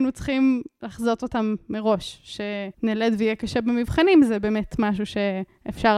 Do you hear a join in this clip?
yes; 1 cut; at 2.7 s

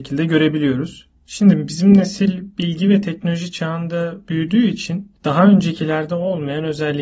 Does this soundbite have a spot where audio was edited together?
yes; 1 cut; at 1.2 s

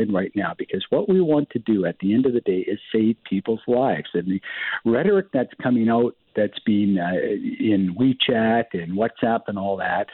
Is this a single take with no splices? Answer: yes; 0 cuts

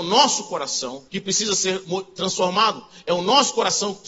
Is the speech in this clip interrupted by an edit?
yes; 1 cut; at 1.1 s

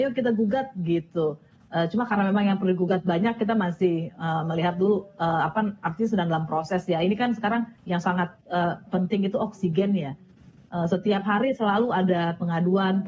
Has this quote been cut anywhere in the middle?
yes; 1 cut; at 7.8 s

